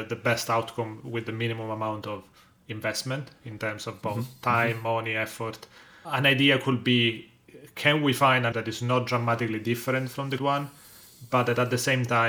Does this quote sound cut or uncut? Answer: cut